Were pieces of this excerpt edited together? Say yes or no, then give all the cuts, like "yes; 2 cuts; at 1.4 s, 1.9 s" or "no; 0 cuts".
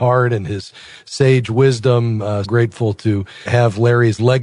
yes; 2 cuts; at 2.4 s, 3.5 s